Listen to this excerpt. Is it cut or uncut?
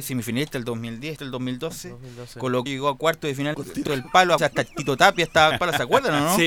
cut